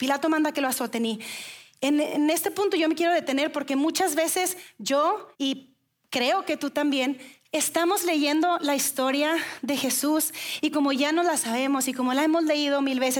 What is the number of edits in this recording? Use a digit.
1